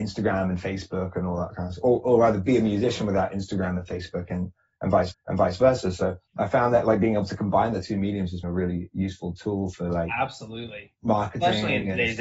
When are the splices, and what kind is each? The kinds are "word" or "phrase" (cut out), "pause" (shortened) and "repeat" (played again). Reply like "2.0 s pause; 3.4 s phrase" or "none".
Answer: 5.1 s repeat; 6.3 s pause; 8.4 s word

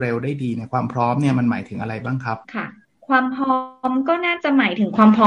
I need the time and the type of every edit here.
2.4 s pause; 2.8 s pause

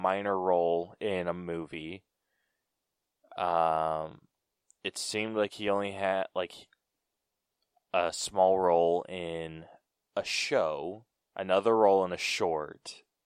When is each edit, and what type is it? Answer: 11.2 s pause

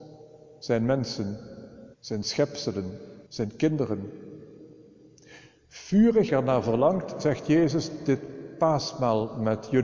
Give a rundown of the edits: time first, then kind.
1.9 s pause; 3.3 s pause; 6.3 s phrase

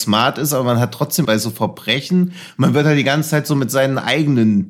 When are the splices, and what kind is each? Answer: 1.2 s phrase

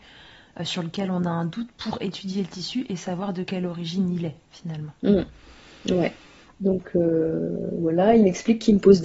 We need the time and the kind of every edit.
none

